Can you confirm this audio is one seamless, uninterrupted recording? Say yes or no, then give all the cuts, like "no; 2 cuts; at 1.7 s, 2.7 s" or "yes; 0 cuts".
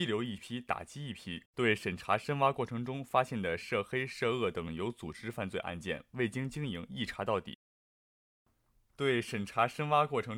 no; 1 cut; at 1.5 s